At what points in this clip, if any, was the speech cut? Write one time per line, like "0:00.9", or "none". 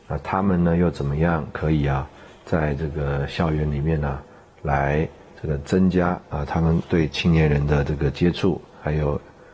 none